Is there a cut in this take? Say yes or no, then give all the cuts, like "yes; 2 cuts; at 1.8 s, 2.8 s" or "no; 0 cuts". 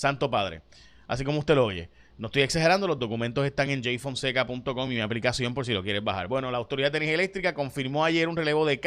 no; 0 cuts